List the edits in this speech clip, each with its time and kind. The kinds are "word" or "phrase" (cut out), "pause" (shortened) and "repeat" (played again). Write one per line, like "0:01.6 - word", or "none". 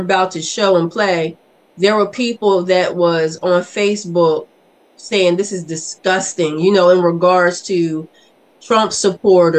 none